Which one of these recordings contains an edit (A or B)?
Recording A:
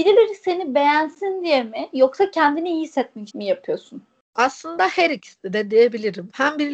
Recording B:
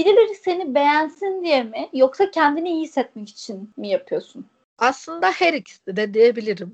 A